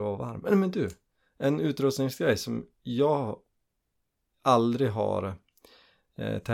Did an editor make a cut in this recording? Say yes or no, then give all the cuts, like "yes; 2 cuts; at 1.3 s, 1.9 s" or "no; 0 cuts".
no; 0 cuts